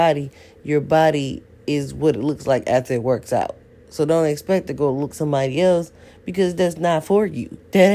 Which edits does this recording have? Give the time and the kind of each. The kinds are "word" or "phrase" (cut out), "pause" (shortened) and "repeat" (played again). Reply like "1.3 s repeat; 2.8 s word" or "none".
5.1 s word